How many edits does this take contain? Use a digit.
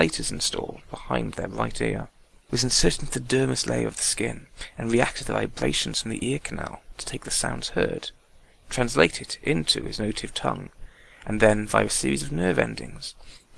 0